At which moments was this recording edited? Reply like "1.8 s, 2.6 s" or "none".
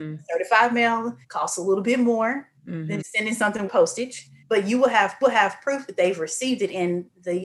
1.2 s, 2.6 s, 3.0 s, 3.7 s, 4.4 s, 5.2 s